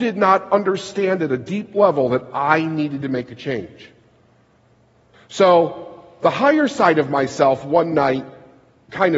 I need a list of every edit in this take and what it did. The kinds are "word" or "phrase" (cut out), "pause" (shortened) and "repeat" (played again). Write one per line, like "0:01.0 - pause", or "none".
none